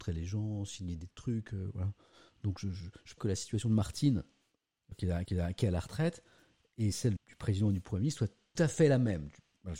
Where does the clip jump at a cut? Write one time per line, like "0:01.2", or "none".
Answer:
0:03.2
0:04.9
0:05.3
0:07.2
0:08.5